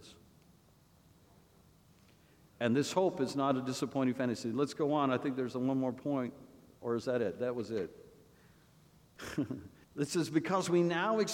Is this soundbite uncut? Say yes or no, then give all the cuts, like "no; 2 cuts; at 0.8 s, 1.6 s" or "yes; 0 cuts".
no; 1 cut; at 9.8 s